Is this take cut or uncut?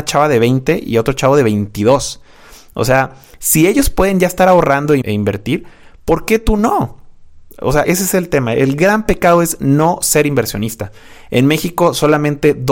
cut